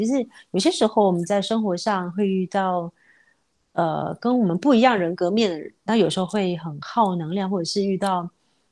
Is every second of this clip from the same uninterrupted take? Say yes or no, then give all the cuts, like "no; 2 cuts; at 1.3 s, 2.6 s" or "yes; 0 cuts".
yes; 0 cuts